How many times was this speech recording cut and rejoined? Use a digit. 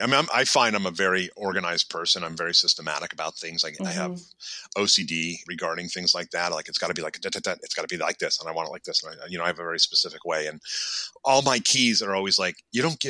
1